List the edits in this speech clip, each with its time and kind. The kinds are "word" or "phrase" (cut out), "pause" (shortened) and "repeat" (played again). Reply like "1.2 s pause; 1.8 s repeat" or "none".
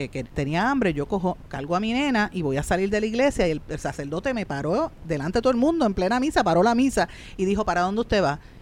none